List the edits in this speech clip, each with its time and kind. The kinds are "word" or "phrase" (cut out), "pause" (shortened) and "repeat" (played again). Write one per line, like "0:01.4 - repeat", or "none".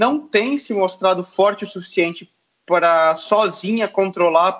none